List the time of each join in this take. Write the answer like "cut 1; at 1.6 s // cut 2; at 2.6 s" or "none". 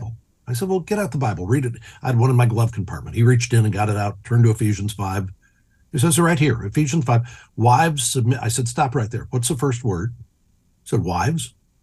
none